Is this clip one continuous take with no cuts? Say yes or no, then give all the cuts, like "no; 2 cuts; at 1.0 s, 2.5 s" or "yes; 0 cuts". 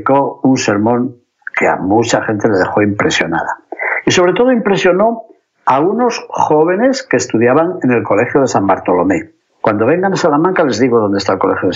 no; 1 cut; at 9.4 s